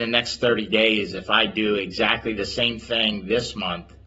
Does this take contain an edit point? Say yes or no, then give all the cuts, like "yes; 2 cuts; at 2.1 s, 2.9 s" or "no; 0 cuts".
no; 0 cuts